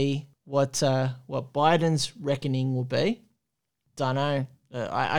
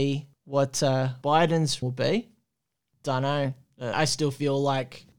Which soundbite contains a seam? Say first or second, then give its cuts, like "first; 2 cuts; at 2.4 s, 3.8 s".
second; 3 cuts; at 1.2 s, 1.8 s, 3.9 s